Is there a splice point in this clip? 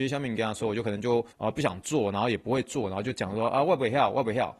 yes; 1 cut; at 1.3 s

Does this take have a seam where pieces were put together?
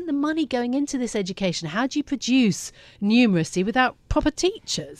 no; 0 cuts

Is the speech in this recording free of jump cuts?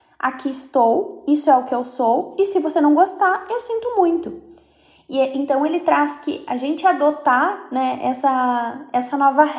yes; 0 cuts

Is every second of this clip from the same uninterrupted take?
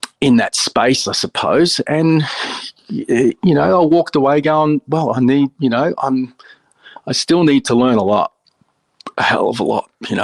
yes; 0 cuts

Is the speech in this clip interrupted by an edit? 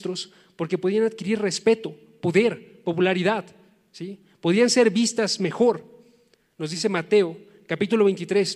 no; 0 cuts

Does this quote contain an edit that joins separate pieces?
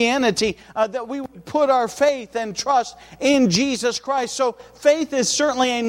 no; 0 cuts

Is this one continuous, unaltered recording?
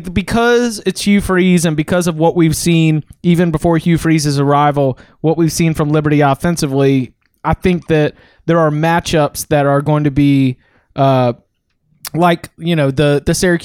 yes; 0 cuts

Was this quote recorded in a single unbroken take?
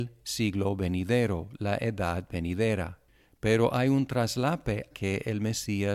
no; 1 cut; at 4.9 s

